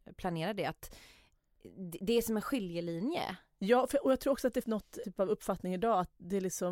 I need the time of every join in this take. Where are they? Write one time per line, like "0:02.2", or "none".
0:04.6
0:05.0